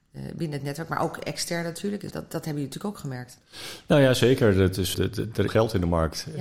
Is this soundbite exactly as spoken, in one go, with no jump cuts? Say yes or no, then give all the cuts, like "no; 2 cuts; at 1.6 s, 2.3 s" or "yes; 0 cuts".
no; 3 cuts; at 2.1 s, 4.9 s, 5.5 s